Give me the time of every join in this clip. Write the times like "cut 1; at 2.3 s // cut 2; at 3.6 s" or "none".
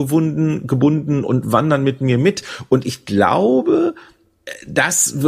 none